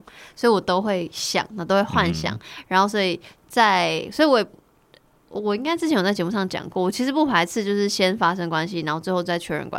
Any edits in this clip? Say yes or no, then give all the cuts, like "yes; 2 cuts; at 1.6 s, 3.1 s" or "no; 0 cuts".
no; 0 cuts